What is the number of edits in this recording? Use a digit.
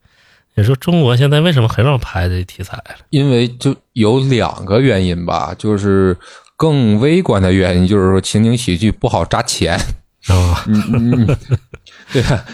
0